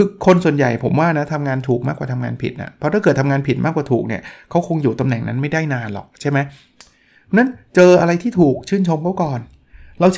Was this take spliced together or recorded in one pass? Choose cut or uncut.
uncut